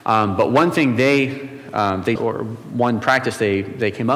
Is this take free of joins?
no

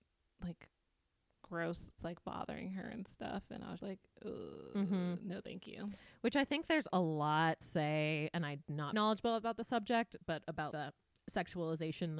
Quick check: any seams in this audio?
yes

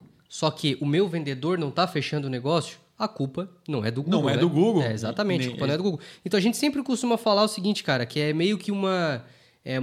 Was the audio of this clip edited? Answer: no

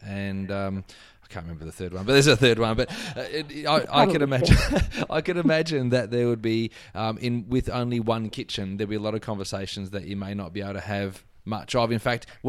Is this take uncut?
yes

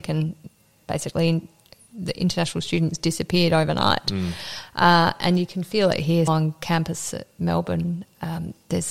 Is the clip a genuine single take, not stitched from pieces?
no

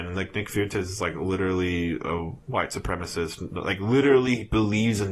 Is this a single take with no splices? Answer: yes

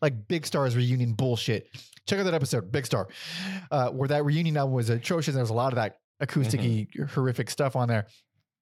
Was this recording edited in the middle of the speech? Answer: no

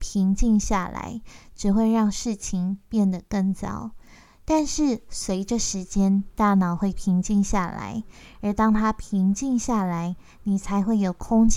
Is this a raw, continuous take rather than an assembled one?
yes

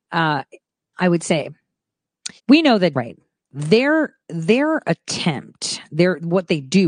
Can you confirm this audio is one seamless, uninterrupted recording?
no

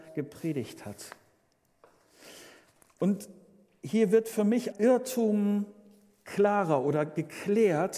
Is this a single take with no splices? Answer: no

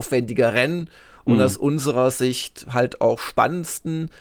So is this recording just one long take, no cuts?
yes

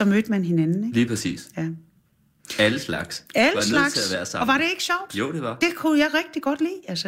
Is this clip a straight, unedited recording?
yes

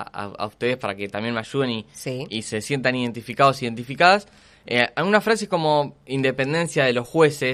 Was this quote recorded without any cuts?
yes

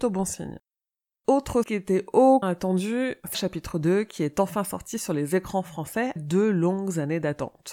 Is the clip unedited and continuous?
no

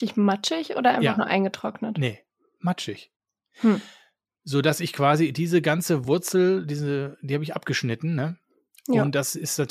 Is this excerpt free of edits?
yes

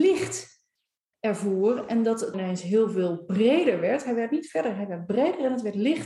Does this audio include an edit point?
yes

